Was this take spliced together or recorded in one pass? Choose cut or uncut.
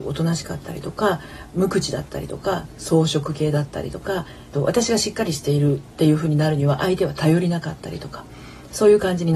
cut